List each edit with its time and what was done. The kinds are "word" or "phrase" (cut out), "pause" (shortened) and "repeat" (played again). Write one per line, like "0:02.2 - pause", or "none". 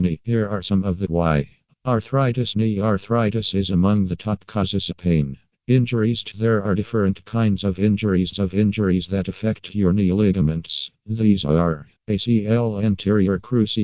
0:01.1 - word
0:04.9 - phrase
0:06.3 - word
0:08.3 - repeat
0:11.0 - pause
0:12.0 - pause